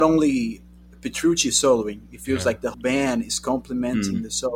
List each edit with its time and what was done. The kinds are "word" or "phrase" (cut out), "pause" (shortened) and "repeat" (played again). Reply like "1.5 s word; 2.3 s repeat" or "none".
2.7 s word